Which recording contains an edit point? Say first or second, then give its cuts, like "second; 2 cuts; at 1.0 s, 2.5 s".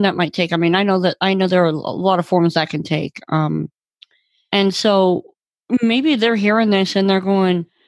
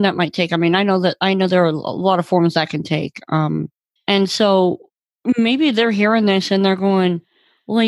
second; 1 cut; at 4.0 s